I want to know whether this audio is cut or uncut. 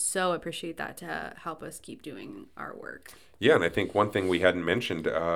uncut